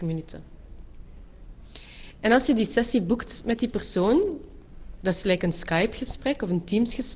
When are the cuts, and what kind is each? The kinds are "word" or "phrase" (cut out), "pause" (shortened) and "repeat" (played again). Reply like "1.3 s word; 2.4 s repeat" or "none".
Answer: none